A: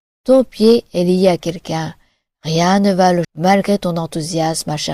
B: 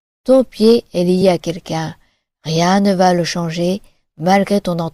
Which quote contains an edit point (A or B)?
A